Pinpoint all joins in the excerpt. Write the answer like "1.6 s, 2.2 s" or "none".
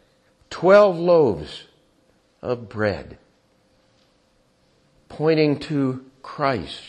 none